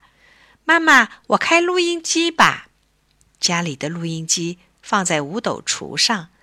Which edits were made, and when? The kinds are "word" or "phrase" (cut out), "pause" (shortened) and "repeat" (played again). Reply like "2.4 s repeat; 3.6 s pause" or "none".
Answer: 2.7 s pause